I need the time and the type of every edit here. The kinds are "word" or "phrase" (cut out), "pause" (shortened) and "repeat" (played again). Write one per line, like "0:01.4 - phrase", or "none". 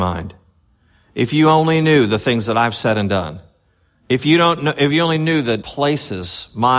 0:05.6 - word